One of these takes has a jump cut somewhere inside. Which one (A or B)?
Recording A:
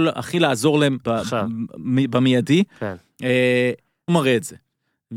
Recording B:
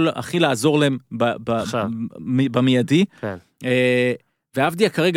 A